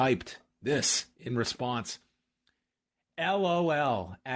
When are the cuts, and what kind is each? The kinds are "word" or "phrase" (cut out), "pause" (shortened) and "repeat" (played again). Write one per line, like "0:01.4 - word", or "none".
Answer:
none